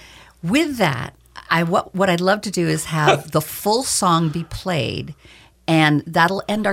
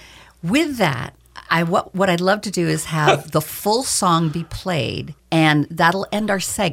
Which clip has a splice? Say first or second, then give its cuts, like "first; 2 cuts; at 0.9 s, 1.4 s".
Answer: second; 1 cut; at 5.2 s